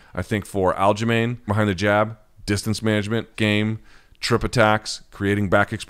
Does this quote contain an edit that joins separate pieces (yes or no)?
yes